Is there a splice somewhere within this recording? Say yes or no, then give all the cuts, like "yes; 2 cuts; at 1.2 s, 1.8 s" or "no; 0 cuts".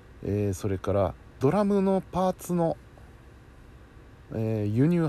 yes; 1 cut; at 1.4 s